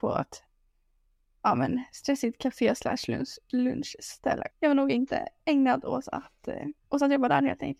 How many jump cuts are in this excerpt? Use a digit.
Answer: 2